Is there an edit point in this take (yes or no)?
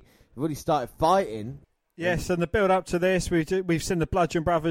no